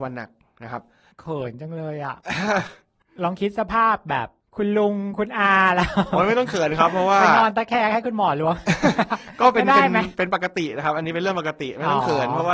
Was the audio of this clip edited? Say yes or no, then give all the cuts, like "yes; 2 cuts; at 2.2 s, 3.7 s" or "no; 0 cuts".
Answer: no; 0 cuts